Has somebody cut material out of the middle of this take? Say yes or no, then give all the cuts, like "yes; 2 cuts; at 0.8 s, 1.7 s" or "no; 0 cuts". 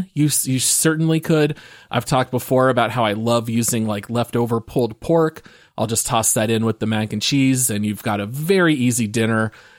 no; 0 cuts